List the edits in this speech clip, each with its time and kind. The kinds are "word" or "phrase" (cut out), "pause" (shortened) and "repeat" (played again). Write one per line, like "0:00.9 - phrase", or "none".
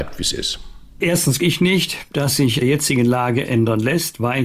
0:01.4 - word
0:02.6 - phrase
0:03.4 - word